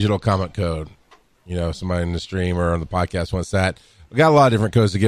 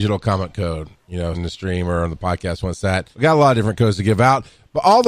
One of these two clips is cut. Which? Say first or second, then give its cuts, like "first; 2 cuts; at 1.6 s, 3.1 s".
second; 3 cuts; at 1.0 s, 1.3 s, 3.1 s